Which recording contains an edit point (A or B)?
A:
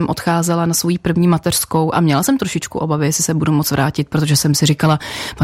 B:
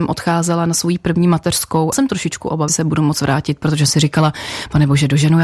B